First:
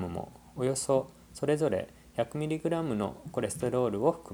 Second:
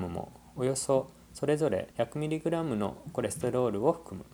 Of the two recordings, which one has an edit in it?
second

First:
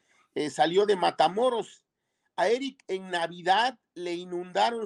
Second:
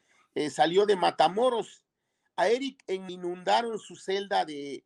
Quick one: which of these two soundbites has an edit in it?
second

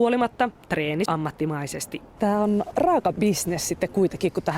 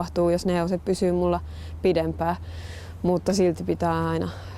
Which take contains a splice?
first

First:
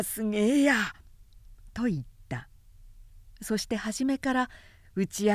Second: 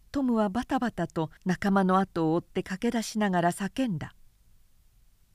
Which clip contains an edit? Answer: second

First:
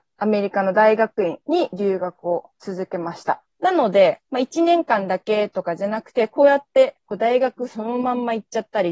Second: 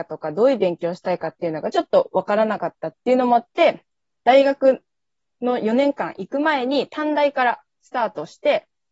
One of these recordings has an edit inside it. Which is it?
first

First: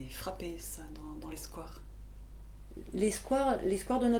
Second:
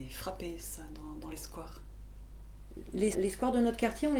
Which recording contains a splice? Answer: second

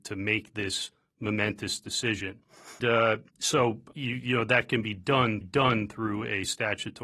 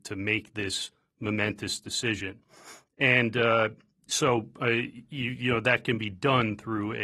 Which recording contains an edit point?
first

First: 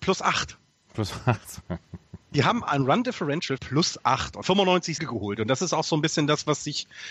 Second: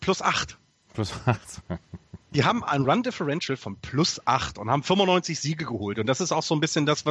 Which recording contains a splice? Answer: first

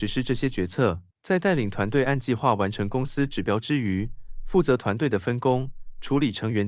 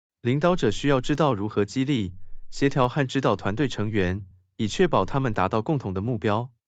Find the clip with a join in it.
first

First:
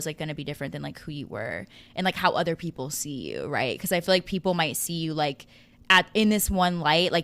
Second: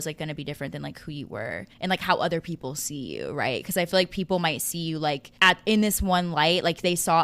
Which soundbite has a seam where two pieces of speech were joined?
second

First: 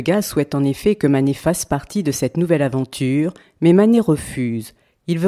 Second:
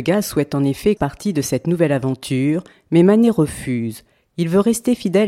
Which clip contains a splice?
second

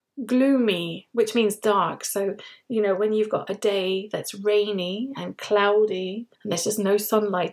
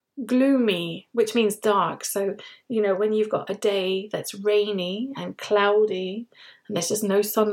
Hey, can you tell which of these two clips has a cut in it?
first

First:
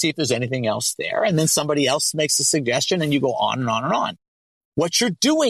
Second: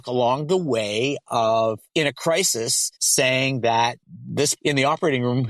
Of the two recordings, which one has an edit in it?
second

